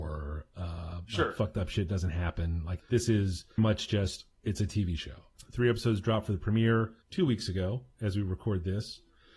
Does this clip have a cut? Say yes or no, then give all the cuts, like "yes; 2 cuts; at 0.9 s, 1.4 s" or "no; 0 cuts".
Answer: yes; 2 cuts; at 3.6 s, 7.0 s